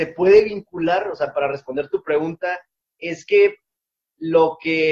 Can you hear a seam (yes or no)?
no